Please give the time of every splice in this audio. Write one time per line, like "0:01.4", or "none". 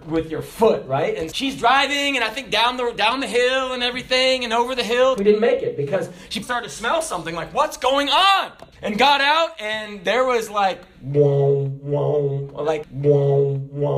0:01.3
0:05.2
0:06.4
0:08.7
0:12.8